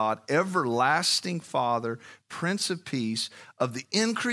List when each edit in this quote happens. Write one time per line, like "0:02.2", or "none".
none